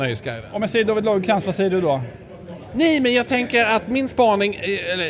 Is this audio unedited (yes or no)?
yes